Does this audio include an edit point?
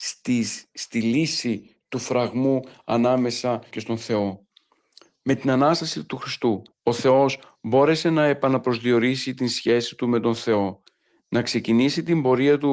yes; 2 cuts; at 3.7 s, 6.7 s

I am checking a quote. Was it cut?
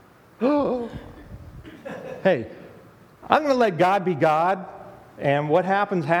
no; 0 cuts

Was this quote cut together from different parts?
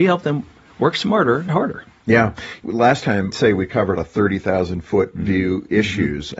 yes; 4 cuts; at 1.5 s, 2.6 s, 3.3 s, 4.0 s

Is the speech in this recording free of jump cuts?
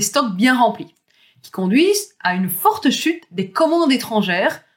yes; 0 cuts

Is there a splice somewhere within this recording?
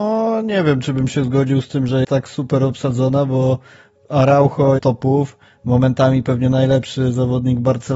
yes; 2 cuts; at 2.0 s, 4.8 s

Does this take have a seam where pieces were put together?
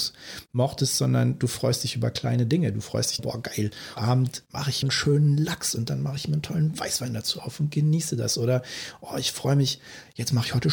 yes; 3 cuts; at 3.2 s, 4.0 s, 4.8 s

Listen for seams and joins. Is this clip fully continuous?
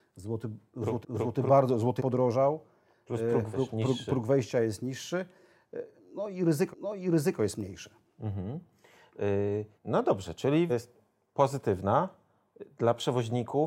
no; 6 cuts; at 1.0 s, 2.0 s, 3.5 s, 6.7 s, 9.8 s, 10.7 s

